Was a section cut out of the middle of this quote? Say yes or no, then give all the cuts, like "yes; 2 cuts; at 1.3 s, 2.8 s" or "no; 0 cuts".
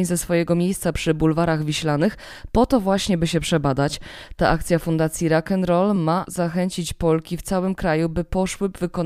no; 0 cuts